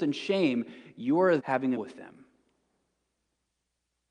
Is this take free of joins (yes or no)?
no